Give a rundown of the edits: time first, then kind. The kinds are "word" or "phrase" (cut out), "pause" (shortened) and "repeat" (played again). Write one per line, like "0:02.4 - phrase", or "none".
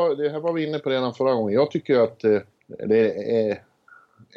0:02.6 - pause